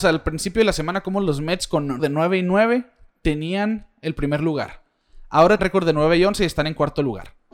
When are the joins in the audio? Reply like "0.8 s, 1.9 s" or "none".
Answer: 2.0 s, 5.6 s

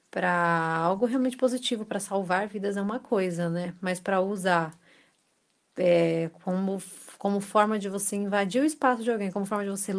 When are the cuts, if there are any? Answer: none

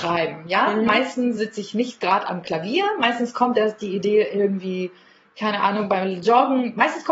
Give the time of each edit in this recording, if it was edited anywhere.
none

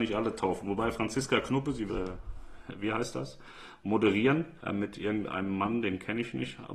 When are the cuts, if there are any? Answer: 1.9 s, 4.6 s

